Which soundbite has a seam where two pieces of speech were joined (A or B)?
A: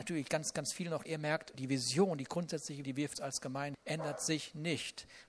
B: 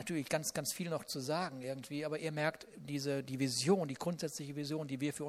A